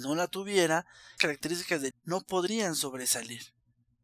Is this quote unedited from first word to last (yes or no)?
no